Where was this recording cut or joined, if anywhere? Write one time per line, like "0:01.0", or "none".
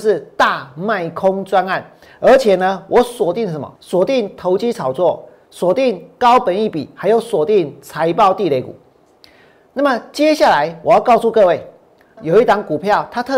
0:03.8
0:09.2
0:12.2